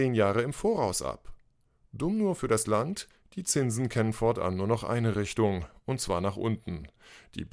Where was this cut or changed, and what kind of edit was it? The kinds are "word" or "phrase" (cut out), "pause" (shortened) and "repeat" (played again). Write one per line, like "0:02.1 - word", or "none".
none